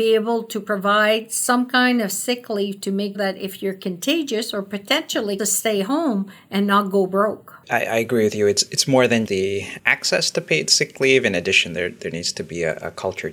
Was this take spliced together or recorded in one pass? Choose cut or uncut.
cut